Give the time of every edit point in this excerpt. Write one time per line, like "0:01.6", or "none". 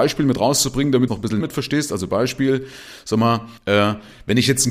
0:01.1
0:01.4
0:03.6